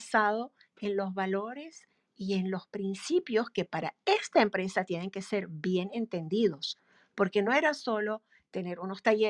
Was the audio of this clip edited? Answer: no; 0 cuts

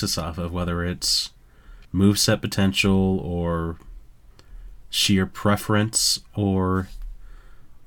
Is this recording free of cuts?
no; 1 cut; at 1.8 s

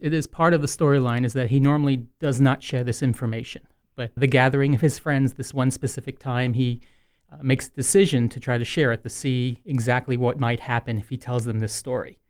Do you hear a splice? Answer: yes; 1 cut; at 4.2 s

